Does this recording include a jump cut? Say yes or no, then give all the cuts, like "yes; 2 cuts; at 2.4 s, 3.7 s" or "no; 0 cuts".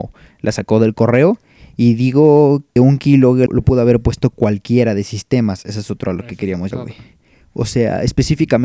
yes; 3 cuts; at 2.8 s, 3.5 s, 6.7 s